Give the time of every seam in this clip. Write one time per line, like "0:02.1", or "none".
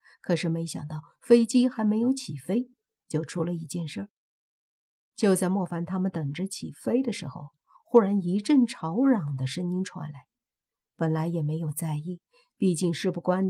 none